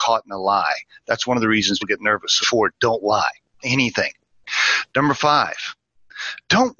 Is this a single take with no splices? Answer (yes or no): no